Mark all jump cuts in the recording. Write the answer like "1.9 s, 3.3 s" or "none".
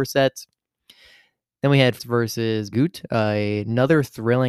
2.0 s, 2.7 s